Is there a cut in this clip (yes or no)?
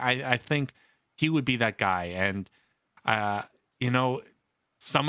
no